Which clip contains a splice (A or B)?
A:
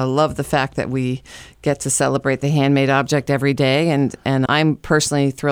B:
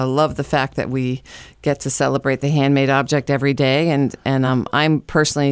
A